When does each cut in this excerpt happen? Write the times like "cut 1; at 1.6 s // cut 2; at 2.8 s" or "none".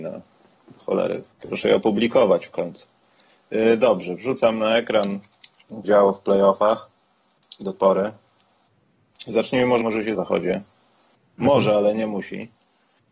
cut 1; at 1.3 s // cut 2; at 5.8 s // cut 3; at 7.7 s // cut 4; at 9.8 s // cut 5; at 10.1 s